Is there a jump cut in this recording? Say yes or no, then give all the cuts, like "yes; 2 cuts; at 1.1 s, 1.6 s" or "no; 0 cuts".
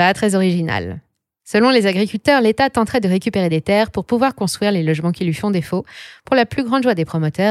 no; 0 cuts